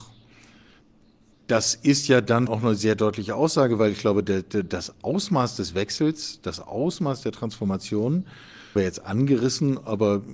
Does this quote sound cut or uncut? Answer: cut